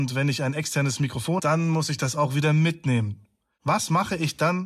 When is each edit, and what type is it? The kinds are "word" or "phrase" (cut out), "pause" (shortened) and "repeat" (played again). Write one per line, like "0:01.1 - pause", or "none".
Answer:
0:01.4 - word